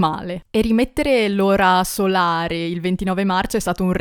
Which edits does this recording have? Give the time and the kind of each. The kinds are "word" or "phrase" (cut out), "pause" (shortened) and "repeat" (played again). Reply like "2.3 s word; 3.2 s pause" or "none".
none